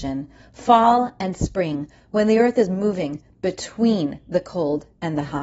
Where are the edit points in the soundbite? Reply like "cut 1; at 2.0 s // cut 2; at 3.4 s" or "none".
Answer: none